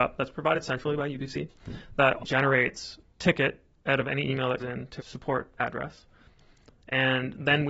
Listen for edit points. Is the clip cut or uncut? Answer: cut